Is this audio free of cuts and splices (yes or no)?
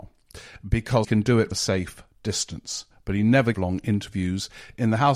no